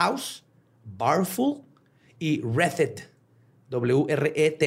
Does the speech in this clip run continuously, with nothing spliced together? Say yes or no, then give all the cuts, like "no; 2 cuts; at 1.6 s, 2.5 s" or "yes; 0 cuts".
yes; 0 cuts